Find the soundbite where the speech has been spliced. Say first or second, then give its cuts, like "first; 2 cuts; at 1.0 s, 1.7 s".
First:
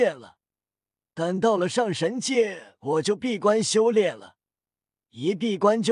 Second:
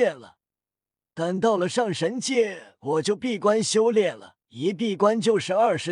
second; 1 cut; at 4.4 s